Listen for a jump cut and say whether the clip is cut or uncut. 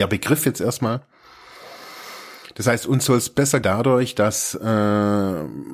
cut